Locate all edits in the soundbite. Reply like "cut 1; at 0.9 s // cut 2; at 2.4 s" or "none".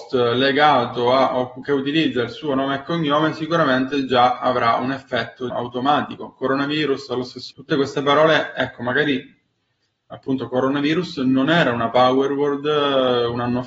cut 1; at 5.5 s // cut 2; at 7.5 s